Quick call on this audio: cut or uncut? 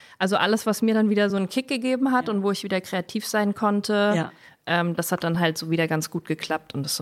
uncut